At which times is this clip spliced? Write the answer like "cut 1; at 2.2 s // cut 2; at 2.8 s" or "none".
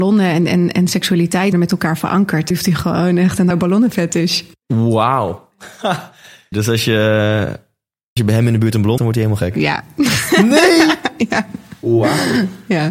cut 1; at 1.5 s // cut 2; at 2.5 s // cut 3; at 3.5 s // cut 4; at 6.5 s // cut 5; at 8.2 s // cut 6; at 9.0 s